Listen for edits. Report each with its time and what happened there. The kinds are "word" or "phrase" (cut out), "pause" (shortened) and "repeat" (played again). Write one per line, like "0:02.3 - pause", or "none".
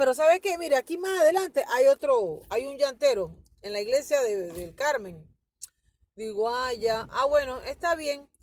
none